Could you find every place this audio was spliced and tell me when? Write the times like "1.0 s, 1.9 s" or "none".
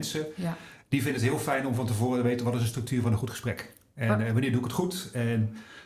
none